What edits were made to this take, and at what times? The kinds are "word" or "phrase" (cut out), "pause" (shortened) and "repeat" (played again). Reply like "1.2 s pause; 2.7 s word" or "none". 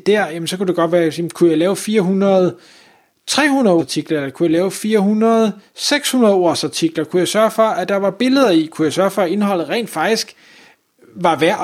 3.8 s word